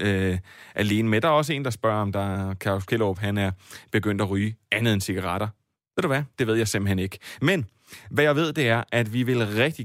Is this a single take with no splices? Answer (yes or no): yes